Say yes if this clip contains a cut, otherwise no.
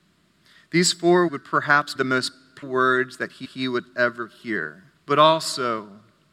yes